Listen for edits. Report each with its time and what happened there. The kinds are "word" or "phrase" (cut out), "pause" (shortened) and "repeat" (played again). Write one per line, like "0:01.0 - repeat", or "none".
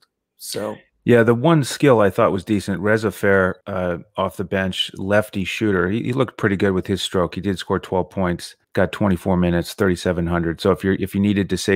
0:03.6 - pause
0:08.6 - pause